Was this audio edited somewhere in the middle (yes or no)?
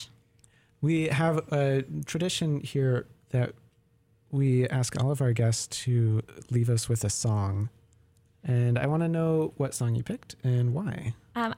no